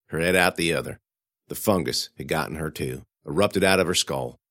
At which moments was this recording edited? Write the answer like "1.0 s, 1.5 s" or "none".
1.1 s, 3.1 s